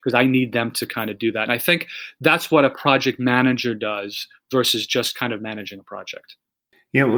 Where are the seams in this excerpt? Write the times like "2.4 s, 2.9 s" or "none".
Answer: none